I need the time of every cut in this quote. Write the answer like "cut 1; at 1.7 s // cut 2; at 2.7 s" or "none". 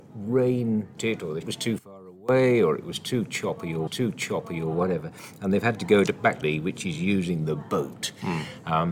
cut 1; at 1.0 s // cut 2; at 1.4 s // cut 3; at 3.9 s // cut 4; at 6.4 s